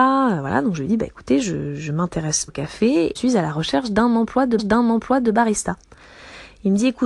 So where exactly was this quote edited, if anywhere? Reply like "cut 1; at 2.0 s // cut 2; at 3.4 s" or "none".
cut 1; at 2.5 s // cut 2; at 3.1 s // cut 3; at 4.6 s